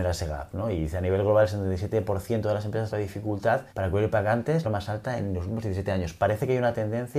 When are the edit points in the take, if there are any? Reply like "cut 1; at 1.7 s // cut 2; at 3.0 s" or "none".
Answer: cut 1; at 2.9 s // cut 2; at 3.7 s // cut 3; at 4.6 s